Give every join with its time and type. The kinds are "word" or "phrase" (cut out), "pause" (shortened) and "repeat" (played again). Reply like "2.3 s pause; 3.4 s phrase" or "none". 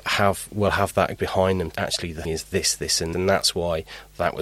1.2 s word; 1.7 s word; 2.2 s word; 3.1 s word